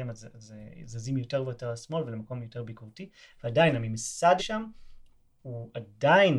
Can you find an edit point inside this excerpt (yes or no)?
yes